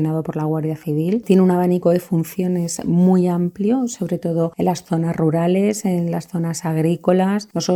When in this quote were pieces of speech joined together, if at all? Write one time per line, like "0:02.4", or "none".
none